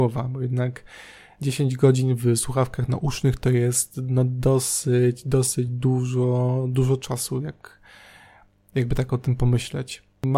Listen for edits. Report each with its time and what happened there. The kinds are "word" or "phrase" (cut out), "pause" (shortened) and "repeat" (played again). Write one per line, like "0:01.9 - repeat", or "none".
none